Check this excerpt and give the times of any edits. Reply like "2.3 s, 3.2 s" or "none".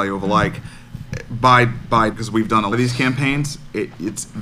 2.1 s, 2.7 s